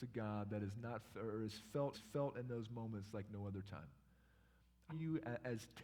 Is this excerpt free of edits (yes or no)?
no